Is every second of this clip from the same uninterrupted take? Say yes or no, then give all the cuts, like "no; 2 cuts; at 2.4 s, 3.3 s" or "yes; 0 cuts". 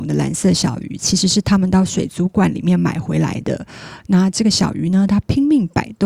yes; 0 cuts